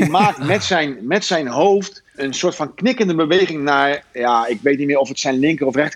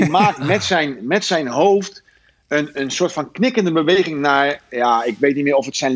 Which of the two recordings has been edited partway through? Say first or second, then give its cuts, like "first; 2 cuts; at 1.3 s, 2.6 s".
first; 1 cut; at 2.1 s